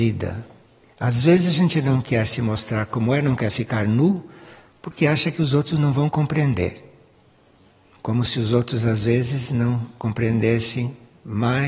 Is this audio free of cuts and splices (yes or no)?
yes